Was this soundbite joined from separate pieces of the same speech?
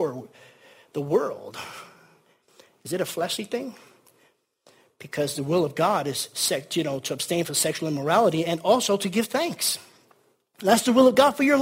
no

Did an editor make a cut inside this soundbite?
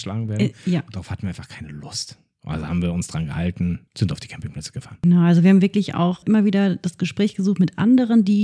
yes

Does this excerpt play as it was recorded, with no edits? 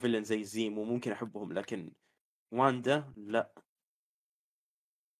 yes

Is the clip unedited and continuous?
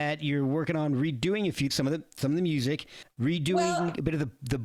no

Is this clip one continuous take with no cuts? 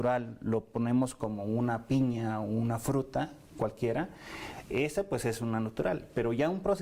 yes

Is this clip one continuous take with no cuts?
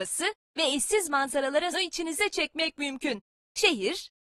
no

